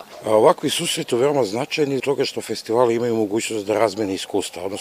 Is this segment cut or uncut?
cut